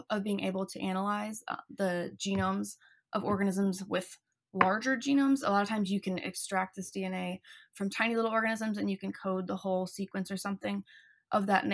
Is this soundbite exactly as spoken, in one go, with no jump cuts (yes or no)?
yes